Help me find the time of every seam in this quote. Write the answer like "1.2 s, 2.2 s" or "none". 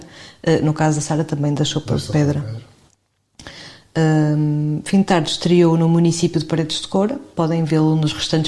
none